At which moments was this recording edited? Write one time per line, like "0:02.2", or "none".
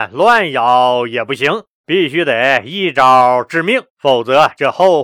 0:01.7
0:03.9